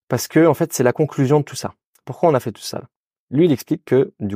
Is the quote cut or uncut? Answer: uncut